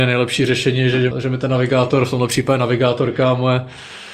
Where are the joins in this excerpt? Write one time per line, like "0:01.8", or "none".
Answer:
0:01.1